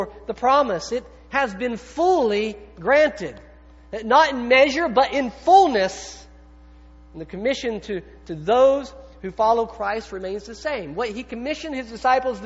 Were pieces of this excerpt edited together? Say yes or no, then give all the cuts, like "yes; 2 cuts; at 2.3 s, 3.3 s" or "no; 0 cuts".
no; 0 cuts